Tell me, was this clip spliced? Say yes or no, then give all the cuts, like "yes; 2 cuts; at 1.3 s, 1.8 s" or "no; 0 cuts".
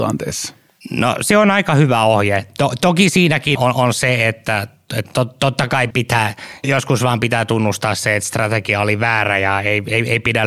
yes; 2 cuts; at 3.6 s, 5.9 s